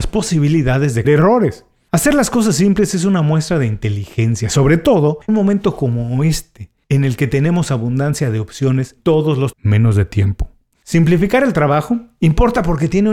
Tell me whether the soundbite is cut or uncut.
cut